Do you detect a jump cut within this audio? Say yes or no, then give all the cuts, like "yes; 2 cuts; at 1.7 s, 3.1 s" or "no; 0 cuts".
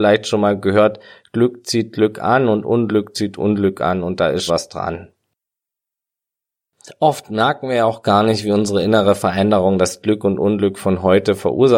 yes; 1 cut; at 4.5 s